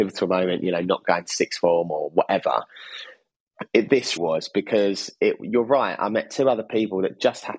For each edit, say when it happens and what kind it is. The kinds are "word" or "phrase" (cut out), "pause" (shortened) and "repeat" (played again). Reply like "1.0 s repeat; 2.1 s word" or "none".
4.2 s word